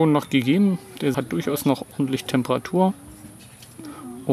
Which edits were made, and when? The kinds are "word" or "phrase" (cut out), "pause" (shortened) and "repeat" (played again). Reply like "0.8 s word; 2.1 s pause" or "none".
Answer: 1.1 s word

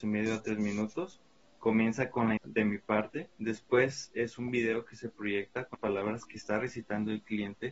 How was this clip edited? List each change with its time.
2.4 s word; 3.3 s pause; 5.7 s word

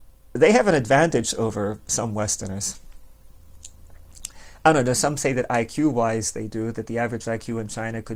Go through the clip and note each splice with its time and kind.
none

